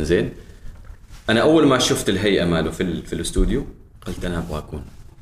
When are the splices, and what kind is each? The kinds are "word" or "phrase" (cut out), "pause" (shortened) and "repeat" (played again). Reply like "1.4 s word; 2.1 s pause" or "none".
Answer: 3.9 s pause